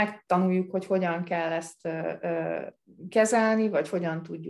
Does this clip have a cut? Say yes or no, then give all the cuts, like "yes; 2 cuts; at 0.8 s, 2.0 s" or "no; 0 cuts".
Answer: no; 0 cuts